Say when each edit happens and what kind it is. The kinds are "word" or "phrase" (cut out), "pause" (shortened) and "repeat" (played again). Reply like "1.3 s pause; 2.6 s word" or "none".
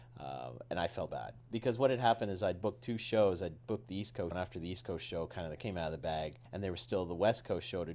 1.1 s word; 4.3 s word; 5.6 s word; 6.5 s pause